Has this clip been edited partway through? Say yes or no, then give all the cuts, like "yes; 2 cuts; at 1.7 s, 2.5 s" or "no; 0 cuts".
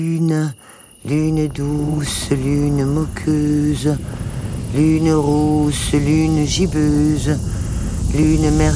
no; 0 cuts